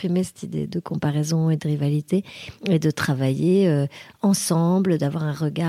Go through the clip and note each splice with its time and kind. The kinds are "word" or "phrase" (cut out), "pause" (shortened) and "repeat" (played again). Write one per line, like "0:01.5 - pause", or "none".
0:02.6 - pause